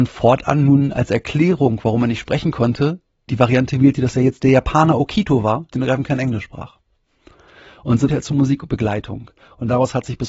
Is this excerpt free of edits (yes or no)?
no